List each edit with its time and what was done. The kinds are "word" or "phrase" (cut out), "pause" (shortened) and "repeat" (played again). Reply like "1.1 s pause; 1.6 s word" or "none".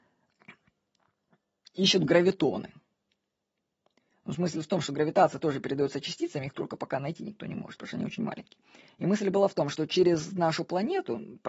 none